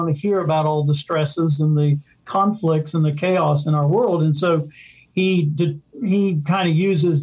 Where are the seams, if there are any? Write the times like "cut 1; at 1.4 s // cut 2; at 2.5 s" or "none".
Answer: none